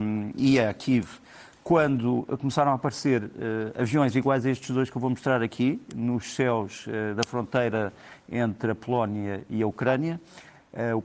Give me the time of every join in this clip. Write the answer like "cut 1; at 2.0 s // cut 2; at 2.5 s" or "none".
none